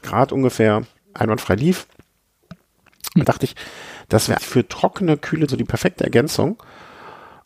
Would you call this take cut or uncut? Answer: cut